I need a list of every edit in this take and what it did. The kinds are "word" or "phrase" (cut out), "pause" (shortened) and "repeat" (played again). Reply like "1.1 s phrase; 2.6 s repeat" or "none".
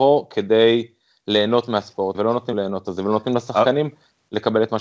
2.1 s word; 2.5 s word; 2.8 s word